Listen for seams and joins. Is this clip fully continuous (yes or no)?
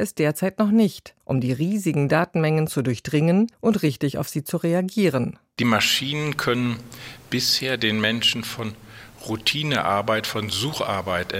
no